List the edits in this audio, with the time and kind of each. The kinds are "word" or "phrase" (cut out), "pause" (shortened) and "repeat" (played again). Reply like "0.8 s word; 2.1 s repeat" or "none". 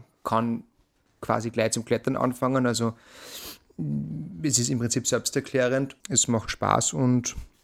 6.0 s pause